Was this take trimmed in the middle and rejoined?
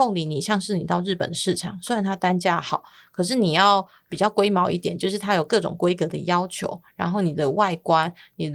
no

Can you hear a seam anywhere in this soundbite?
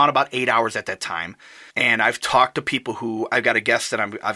yes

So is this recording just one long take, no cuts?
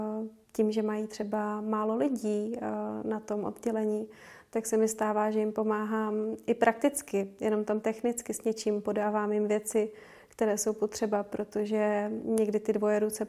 yes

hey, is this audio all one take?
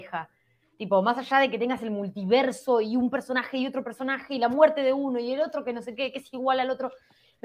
yes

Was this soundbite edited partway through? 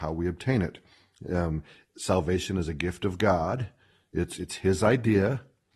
no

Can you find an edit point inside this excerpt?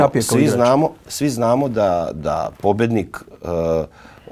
yes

